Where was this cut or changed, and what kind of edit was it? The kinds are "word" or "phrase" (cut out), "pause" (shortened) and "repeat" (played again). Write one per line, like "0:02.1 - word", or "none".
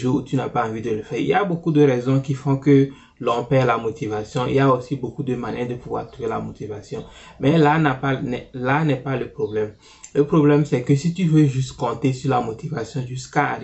none